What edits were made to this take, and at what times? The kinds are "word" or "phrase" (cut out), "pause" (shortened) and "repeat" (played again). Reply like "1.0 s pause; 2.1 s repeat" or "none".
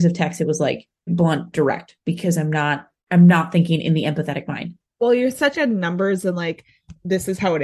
1.1 s word; 3.0 s pause; 5.5 s word